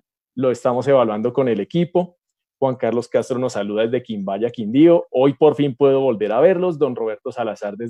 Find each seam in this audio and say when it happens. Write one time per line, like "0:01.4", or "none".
none